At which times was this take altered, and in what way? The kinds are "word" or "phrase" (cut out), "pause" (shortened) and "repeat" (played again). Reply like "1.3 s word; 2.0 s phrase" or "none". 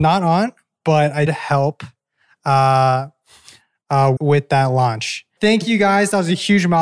1.3 s word; 4.2 s word; 5.4 s word